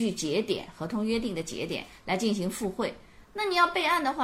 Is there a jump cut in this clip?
no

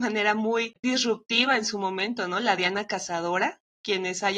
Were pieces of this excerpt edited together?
no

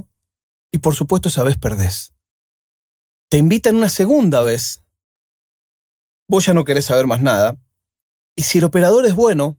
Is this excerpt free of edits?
yes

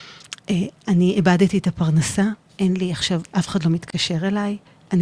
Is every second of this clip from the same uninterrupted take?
no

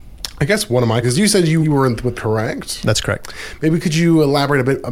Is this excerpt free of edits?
no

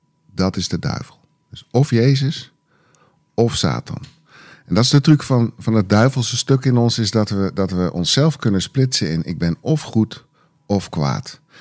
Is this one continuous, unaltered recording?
yes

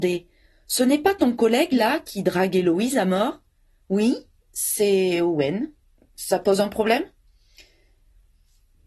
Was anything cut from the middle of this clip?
no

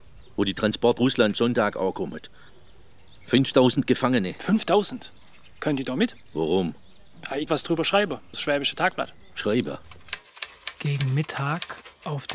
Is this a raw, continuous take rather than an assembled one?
no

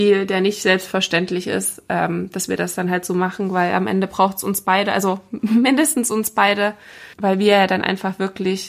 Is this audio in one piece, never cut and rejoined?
yes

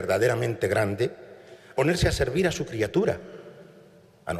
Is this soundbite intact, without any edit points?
no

